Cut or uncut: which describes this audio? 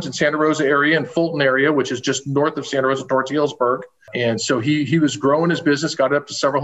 uncut